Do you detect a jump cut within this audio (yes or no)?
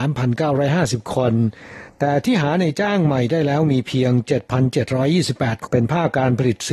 yes